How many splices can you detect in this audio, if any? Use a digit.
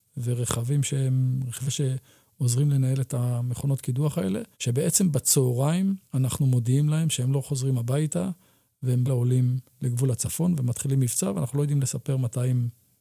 4